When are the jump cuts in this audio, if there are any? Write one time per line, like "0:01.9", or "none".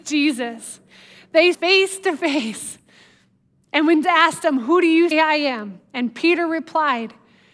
0:01.5
0:04.0
0:05.1